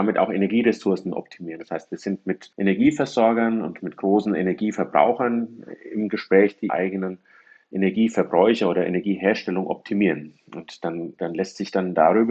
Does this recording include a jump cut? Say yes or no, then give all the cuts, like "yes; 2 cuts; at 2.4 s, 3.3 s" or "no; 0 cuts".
yes; 2 cuts; at 2.5 s, 6.7 s